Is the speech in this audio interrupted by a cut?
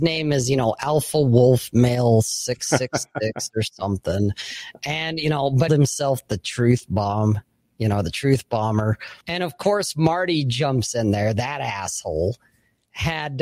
yes; 2 cuts; at 5.7 s, 9.2 s

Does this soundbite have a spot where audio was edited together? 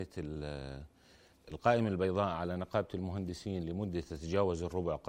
no; 0 cuts

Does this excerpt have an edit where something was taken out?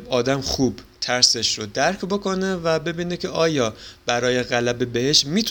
no; 0 cuts

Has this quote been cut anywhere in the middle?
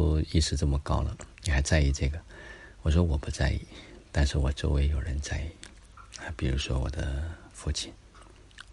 yes; 1 cut; at 1.3 s

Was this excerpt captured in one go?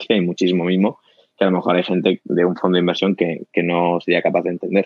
yes; 0 cuts

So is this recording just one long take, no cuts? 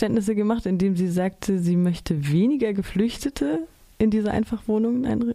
yes; 0 cuts

